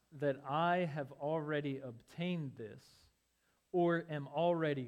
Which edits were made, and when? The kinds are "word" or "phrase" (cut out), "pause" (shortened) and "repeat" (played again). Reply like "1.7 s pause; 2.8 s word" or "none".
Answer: none